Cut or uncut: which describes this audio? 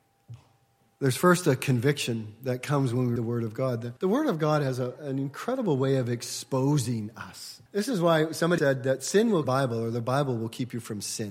cut